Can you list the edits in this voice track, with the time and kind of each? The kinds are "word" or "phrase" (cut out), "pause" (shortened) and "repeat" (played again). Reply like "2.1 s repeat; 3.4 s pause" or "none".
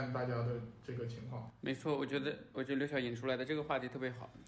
none